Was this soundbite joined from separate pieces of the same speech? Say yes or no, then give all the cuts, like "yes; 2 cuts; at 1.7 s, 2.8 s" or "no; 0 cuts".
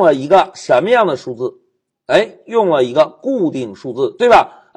no; 0 cuts